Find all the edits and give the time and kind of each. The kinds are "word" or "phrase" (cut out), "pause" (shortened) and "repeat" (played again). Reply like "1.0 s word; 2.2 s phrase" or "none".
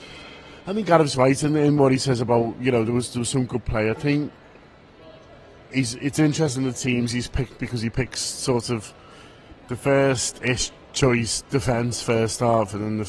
10.8 s pause